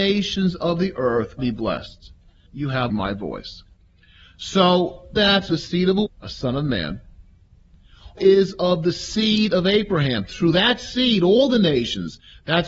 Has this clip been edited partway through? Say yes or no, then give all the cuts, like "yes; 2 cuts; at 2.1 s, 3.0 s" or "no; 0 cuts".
yes; 7 cuts; at 1.4 s, 2.5 s, 2.9 s, 5.2 s, 5.5 s, 6.1 s, 8.2 s